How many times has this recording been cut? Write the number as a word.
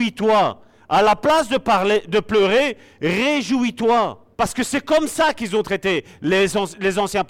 one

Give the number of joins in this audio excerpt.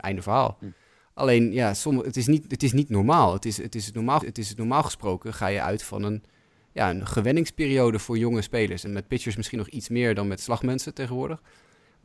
two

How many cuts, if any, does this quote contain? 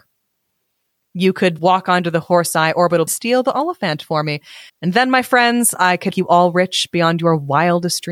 four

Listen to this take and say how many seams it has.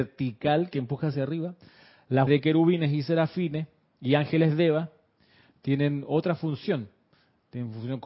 one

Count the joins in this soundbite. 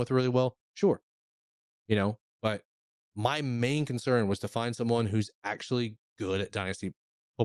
zero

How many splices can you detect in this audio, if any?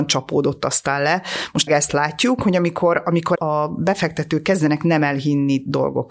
two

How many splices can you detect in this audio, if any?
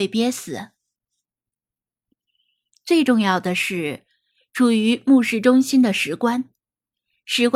zero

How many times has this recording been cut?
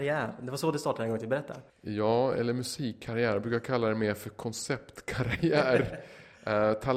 one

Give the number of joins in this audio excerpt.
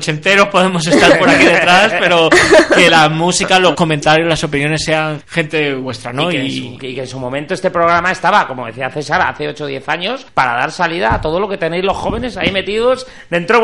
three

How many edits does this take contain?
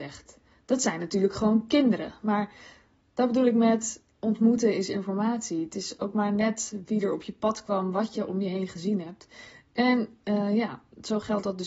zero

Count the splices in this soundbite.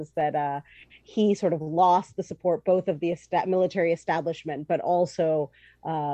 zero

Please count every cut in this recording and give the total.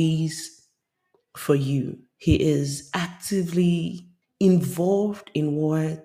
one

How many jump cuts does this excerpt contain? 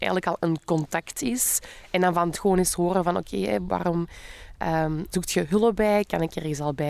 two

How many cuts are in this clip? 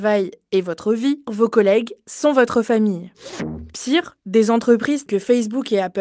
two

